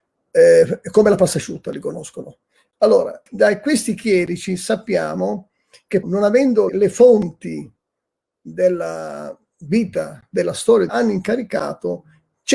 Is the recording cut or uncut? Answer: cut